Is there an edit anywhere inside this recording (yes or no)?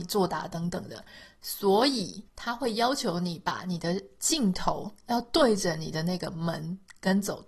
yes